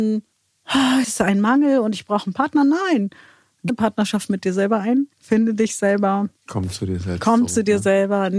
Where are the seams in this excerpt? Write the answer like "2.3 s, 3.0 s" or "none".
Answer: 1.0 s, 3.7 s, 5.1 s, 6.4 s